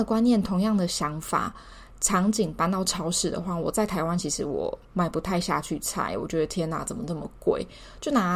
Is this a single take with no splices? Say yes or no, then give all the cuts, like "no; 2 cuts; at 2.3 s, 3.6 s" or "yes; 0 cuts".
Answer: no; 1 cut; at 4.8 s